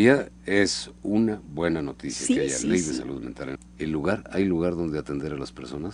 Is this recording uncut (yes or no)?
no